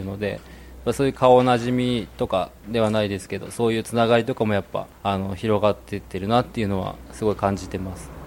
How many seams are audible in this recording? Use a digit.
2